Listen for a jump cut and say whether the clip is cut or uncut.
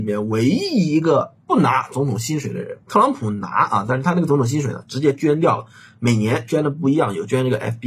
cut